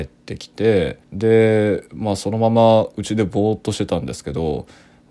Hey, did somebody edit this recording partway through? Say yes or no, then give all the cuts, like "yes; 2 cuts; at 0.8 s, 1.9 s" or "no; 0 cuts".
yes; 1 cut; at 1.0 s